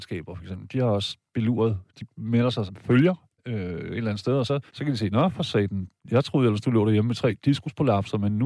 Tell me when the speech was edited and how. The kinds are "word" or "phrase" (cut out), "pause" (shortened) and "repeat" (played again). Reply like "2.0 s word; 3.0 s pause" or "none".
1.9 s pause; 2.7 s word; 3.4 s pause; 4.7 s pause; 6.0 s pause